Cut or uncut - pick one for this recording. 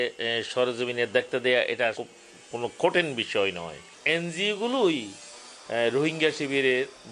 cut